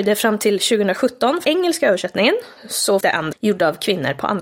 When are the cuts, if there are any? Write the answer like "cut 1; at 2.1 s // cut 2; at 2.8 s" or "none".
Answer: cut 1; at 1.4 s // cut 2; at 3.0 s // cut 3; at 3.3 s